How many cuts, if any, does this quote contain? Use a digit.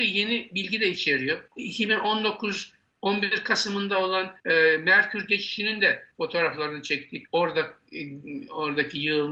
4